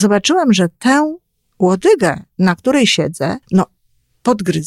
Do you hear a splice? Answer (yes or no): yes